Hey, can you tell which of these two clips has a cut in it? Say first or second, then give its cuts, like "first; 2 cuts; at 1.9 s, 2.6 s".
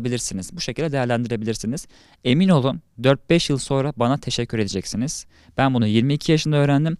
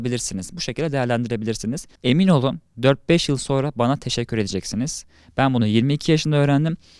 second; 1 cut; at 2.0 s